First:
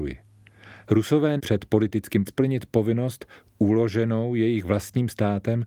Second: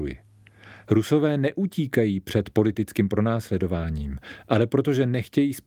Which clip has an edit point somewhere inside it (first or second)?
first